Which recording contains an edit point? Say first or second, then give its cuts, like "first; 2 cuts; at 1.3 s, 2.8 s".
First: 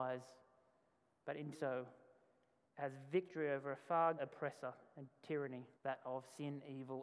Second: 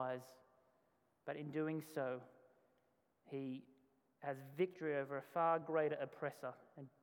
first; 4 cuts; at 1.5 s, 2.7 s, 4.2 s, 5.7 s